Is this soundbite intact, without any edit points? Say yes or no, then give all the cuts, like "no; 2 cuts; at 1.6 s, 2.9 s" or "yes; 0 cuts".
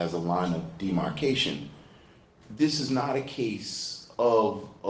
yes; 0 cuts